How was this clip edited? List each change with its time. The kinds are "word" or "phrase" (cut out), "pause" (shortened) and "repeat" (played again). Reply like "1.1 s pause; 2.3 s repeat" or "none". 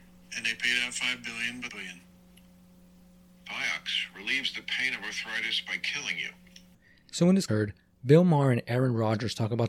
1.7 s phrase; 7.5 s phrase